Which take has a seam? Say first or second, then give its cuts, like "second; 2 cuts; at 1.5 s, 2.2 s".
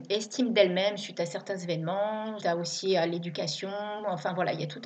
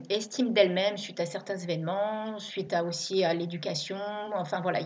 first; 1 cut; at 2.4 s